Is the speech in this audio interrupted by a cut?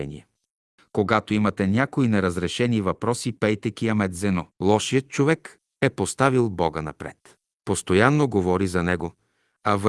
yes; 2 cuts; at 4.5 s, 7.5 s

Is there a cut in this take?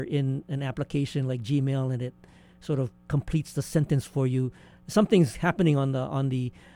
no; 0 cuts

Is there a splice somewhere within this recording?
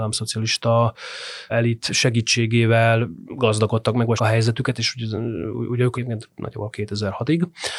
yes; 5 cuts; at 1.5 s, 3.3 s, 4.2 s, 5.5 s, 5.9 s

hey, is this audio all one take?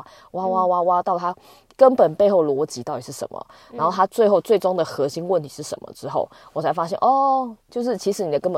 no; 1 cut; at 7.6 s

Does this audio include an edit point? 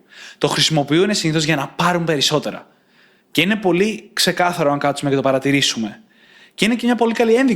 no; 0 cuts

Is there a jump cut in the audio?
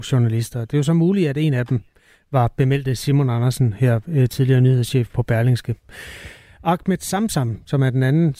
no; 0 cuts

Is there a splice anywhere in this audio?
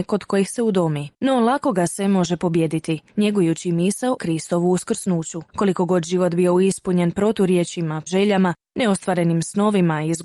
yes; 5 cuts; at 1.1 s, 3.1 s, 4.2 s, 5.5 s, 8.1 s

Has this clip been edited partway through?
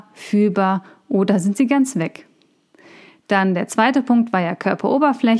no; 0 cuts

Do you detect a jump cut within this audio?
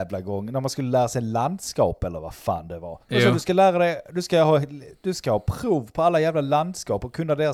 yes; 1 cut; at 3.0 s

